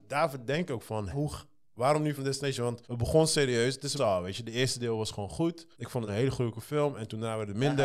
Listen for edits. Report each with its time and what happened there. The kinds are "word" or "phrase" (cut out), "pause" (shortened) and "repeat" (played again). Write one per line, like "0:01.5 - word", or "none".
0:01.1 - word
0:02.2 - word
0:02.8 - pause
0:04.0 - phrase
0:05.7 - pause
0:06.1 - phrase